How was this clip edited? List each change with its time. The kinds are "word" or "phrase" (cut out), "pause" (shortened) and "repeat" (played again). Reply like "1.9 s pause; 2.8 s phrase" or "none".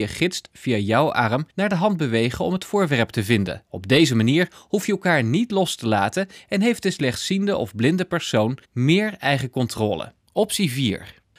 1.5 s pause; 3.7 s pause; 8.6 s pause; 10.2 s pause